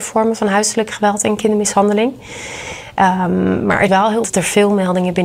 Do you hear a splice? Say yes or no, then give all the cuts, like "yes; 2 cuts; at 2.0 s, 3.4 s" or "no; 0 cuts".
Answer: yes; 2 cuts; at 3.9 s, 4.2 s